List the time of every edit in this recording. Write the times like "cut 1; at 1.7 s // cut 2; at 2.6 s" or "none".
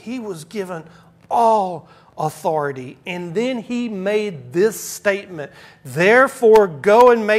none